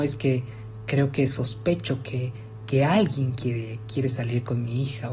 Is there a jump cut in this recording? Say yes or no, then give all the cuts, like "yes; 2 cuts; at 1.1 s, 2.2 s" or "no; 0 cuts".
no; 0 cuts